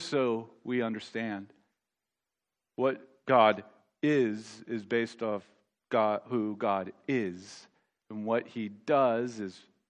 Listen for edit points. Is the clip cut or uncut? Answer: uncut